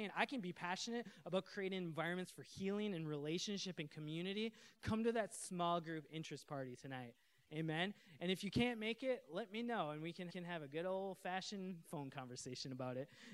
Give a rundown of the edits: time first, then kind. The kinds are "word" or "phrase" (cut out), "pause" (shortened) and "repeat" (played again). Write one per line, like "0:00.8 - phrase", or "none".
0:10.3 - repeat